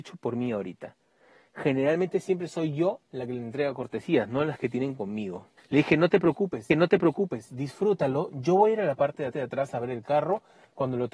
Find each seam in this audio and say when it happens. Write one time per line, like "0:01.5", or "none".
0:05.6
0:06.7
0:09.3